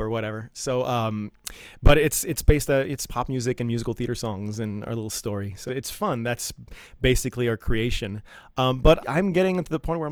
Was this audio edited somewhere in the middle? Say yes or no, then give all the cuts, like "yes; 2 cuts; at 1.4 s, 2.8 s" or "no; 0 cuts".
yes; 3 cuts; at 3.1 s, 5.7 s, 9.0 s